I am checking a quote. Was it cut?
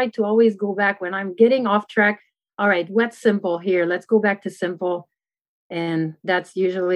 no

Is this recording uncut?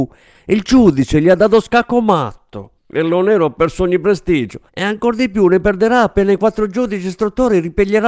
no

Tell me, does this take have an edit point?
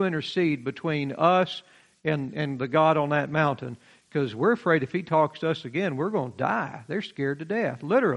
no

